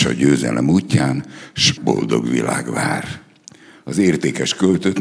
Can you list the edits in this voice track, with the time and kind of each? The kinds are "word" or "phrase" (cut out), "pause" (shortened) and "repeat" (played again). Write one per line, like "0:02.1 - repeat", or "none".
0:01.8 - word